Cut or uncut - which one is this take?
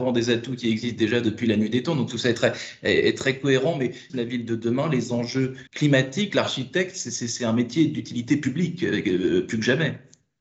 cut